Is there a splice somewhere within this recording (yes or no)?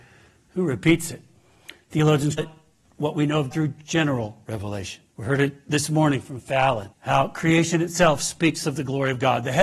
yes